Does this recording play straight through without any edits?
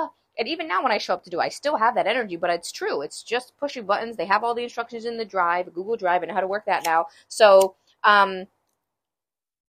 yes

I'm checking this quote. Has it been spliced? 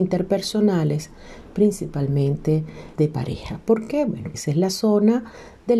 yes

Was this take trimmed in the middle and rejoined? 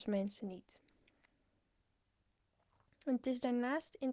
no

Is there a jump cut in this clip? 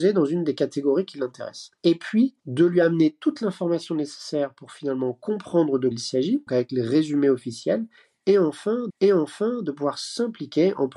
yes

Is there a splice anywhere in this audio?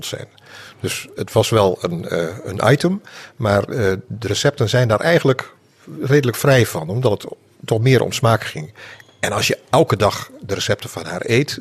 no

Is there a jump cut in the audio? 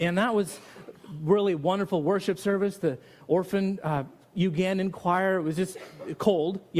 no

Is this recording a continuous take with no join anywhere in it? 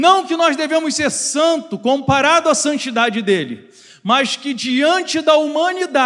yes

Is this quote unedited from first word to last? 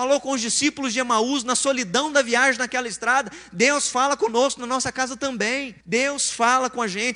no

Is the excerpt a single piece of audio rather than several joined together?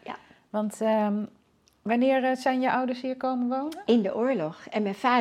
yes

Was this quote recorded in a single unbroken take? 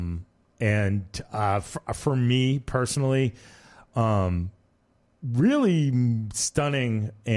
yes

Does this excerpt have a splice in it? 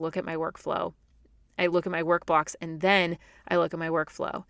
no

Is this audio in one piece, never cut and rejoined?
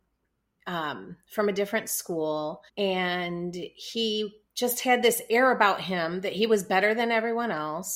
no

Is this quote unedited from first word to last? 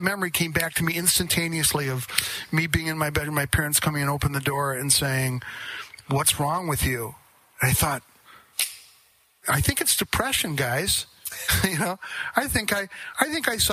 yes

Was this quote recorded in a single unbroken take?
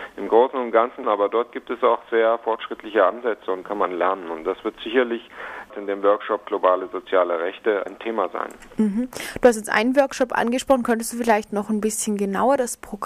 no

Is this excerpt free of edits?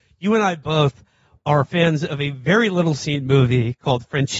yes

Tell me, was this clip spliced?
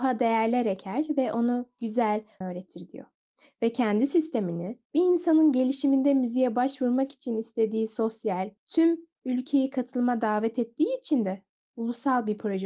yes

